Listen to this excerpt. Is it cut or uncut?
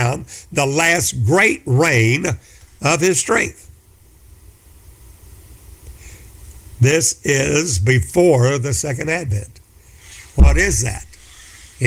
uncut